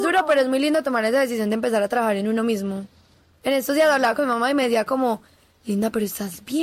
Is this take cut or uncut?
uncut